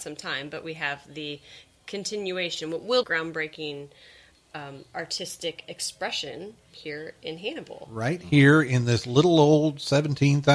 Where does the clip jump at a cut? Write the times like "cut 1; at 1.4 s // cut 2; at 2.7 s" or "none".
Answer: cut 1; at 3.0 s